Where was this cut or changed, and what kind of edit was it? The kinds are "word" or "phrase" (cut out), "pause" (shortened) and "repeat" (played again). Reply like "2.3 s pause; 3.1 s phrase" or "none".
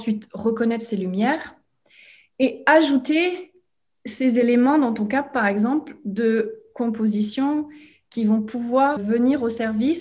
9.0 s word